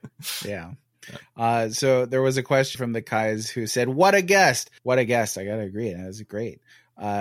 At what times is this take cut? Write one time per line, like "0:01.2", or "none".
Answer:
0:02.7
0:04.8